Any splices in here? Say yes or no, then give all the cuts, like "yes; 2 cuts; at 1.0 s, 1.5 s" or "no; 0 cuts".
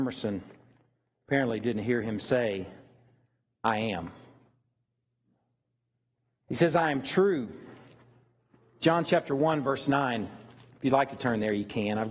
no; 0 cuts